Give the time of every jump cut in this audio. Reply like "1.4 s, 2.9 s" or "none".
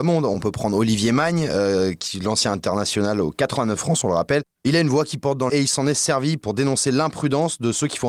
3.8 s, 5.5 s